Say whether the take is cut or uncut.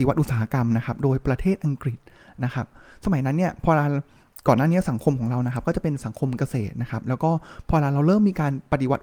uncut